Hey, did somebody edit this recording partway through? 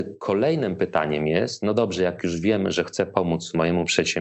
no; 0 cuts

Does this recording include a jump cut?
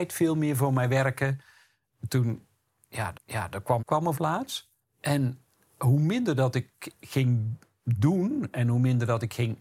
yes; 4 cuts; at 3.1 s, 3.8 s, 4.1 s, 4.8 s

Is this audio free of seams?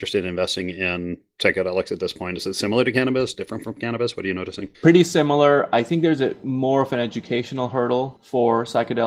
no; 1 cut; at 4.7 s

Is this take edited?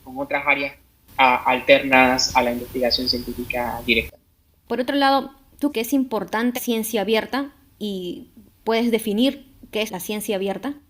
yes; 3 cuts; at 5.7 s, 6.5 s, 9.9 s

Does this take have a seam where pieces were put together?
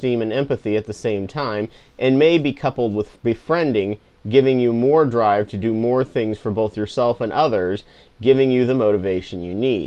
no; 0 cuts

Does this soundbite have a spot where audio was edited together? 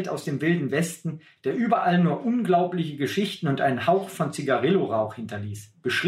no; 0 cuts

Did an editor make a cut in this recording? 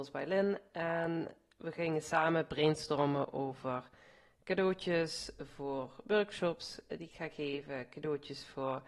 no; 0 cuts

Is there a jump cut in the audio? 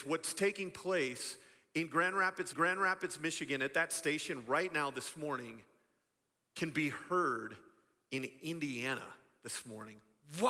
yes; 1 cut; at 2.5 s

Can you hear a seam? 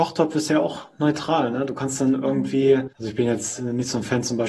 yes; 1 cut; at 2.9 s

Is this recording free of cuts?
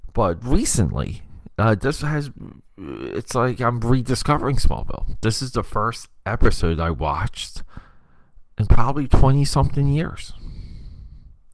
yes; 0 cuts

